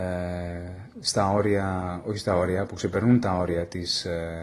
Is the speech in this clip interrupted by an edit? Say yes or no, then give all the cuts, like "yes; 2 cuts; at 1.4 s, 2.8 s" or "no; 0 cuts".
no; 0 cuts